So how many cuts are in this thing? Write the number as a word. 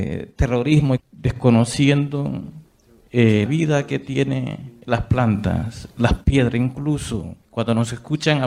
three